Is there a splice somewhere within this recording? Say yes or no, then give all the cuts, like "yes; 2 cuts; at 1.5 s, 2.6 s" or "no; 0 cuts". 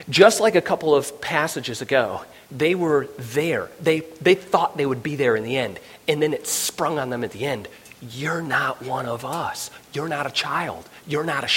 yes; 1 cut; at 2.4 s